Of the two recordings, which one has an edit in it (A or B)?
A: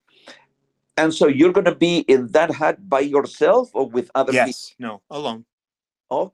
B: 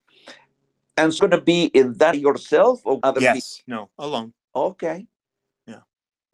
B